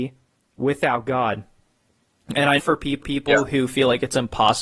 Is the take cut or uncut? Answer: cut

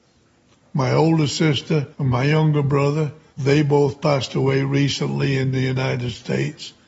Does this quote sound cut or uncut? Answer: cut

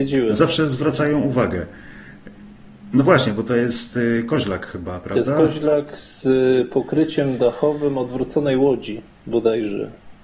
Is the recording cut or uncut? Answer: uncut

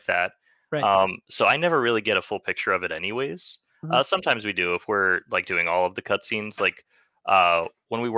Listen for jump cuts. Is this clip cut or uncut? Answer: uncut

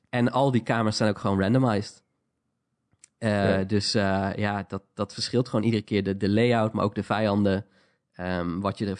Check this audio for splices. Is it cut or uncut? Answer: uncut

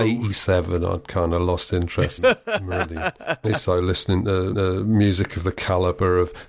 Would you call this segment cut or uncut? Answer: cut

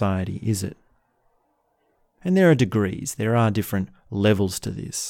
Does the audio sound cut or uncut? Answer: uncut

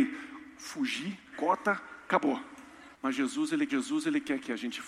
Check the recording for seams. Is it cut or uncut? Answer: cut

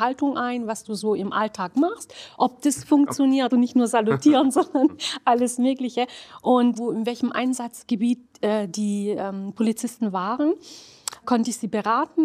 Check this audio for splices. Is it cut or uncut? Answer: cut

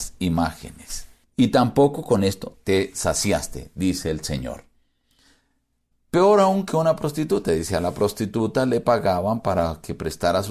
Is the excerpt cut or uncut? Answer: uncut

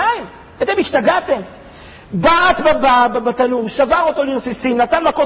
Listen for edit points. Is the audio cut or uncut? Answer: uncut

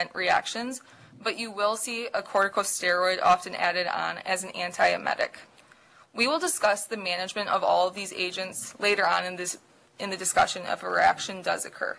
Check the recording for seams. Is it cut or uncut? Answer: uncut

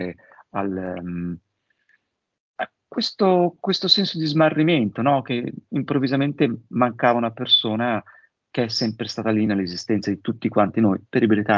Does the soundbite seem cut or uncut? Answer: uncut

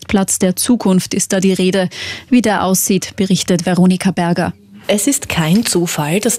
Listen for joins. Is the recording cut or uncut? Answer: uncut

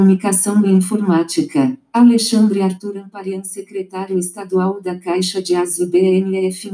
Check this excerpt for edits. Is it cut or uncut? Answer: uncut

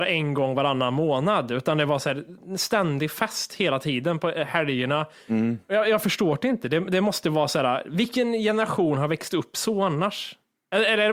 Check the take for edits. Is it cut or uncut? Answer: uncut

